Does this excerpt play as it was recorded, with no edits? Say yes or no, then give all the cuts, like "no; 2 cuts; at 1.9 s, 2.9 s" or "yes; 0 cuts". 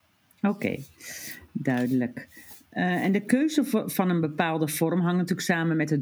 yes; 0 cuts